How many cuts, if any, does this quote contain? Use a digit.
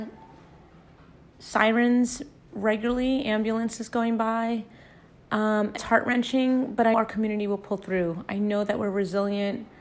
2